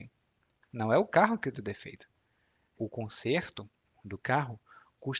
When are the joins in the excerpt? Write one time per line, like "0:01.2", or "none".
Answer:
0:02.8